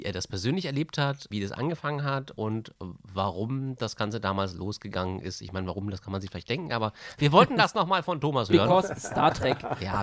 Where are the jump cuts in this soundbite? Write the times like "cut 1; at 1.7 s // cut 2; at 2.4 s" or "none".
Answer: cut 1; at 1.3 s

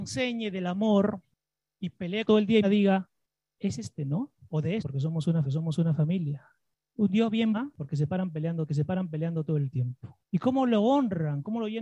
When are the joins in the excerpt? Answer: cut 1; at 1.6 s // cut 2; at 2.2 s // cut 3; at 2.6 s // cut 4; at 3.8 s // cut 5; at 4.8 s // cut 6; at 5.4 s // cut 7; at 7.5 s // cut 8; at 8.7 s // cut 9; at 10.2 s

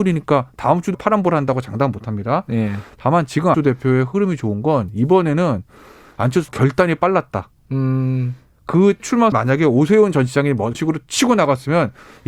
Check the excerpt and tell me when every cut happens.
cut 1; at 0.9 s // cut 2; at 3.5 s // cut 3; at 6.5 s // cut 4; at 9.0 s // cut 5; at 9.3 s // cut 6; at 10.7 s

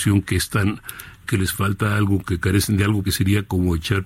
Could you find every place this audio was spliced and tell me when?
cut 1; at 1.2 s // cut 2; at 3.0 s

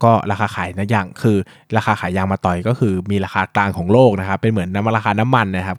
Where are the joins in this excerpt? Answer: none

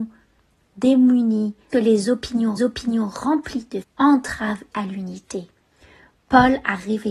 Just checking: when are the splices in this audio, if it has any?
cut 1; at 1.7 s // cut 2; at 2.6 s // cut 3; at 3.8 s // cut 4; at 4.7 s

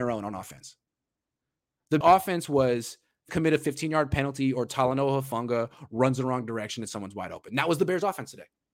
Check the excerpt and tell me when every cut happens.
cut 1; at 2.0 s // cut 2; at 3.3 s

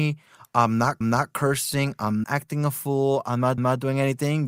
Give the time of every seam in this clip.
cut 1; at 1.0 s // cut 2; at 2.2 s // cut 3; at 3.6 s

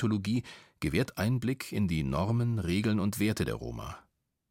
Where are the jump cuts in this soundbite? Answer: none

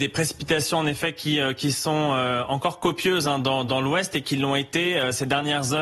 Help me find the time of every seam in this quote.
none

